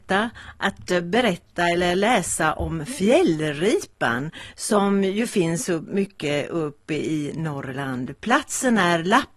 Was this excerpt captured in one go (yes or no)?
yes